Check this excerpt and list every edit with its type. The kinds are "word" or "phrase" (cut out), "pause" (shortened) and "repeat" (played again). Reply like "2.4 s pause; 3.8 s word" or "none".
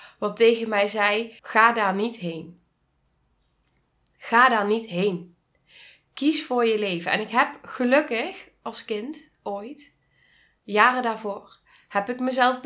1.4 s pause